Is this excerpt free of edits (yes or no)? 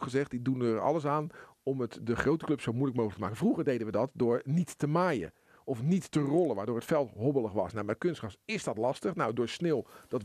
yes